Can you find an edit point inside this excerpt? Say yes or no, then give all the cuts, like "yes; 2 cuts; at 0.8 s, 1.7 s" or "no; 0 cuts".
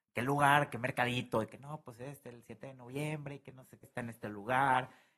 yes; 1 cut; at 3.8 s